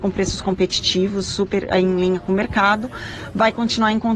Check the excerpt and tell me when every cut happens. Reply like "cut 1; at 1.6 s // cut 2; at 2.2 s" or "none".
none